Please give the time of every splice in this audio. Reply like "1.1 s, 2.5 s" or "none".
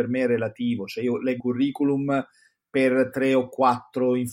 1.4 s

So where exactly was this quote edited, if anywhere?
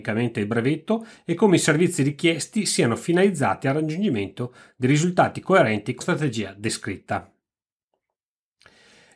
6.0 s

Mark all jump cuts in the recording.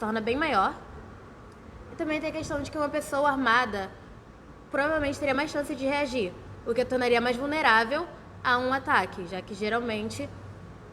none

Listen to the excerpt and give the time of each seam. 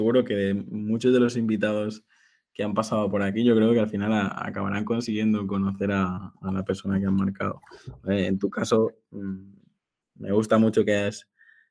none

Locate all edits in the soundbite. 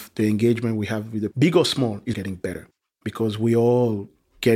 1.3 s, 2.1 s

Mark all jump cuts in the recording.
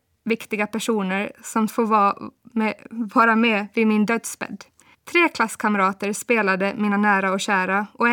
1.7 s, 4.9 s

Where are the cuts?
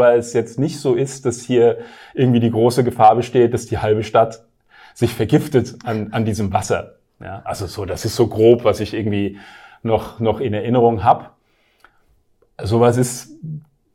none

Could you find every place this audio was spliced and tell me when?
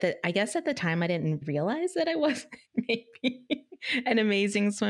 1.4 s, 2.6 s

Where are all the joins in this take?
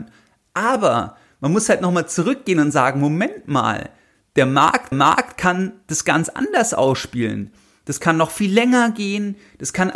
4.9 s

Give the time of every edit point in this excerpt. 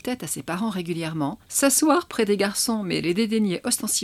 1.4 s

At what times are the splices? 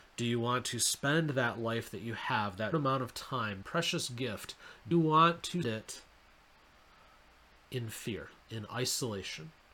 2.7 s, 3.6 s, 4.9 s, 5.6 s, 8.4 s

